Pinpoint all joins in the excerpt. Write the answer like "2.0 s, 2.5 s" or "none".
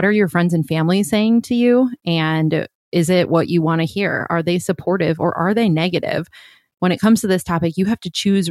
none